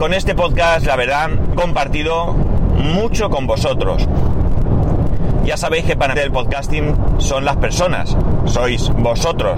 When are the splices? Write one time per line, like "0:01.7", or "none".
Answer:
0:01.5
0:02.3
0:06.1